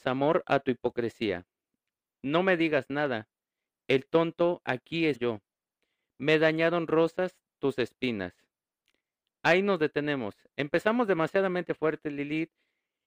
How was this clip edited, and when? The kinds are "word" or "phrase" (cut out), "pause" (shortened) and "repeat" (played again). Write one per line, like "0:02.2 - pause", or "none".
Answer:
0:05.1 - word